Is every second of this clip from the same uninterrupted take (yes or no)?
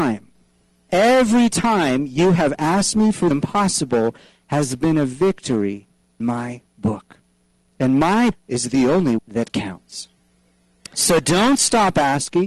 no